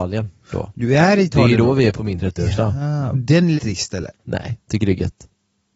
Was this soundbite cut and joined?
yes; 3 cuts; at 1.9 s, 3.1 s, 3.6 s

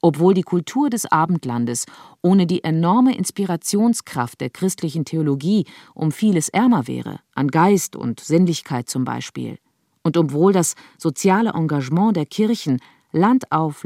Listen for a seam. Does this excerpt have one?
no; 0 cuts

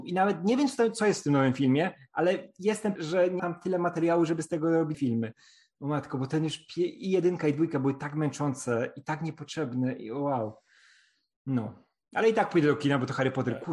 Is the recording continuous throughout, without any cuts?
no; 3 cuts; at 3.0 s, 3.4 s, 4.9 s

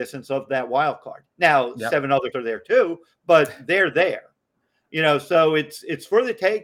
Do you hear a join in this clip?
yes; 2 cuts; at 1.3 s, 2.3 s

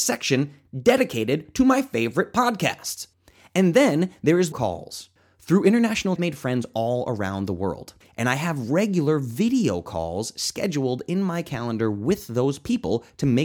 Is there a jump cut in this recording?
yes; 3 cuts; at 4.5 s, 6.2 s, 8.0 s

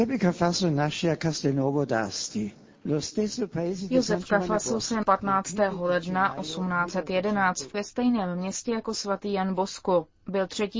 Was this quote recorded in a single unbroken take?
no; 3 cuts; at 2.7 s, 5.0 s, 7.7 s

